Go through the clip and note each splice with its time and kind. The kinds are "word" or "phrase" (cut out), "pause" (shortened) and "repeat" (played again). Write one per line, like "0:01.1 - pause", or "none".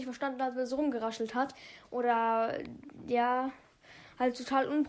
none